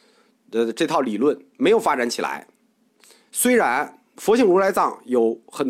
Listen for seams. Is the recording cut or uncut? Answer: uncut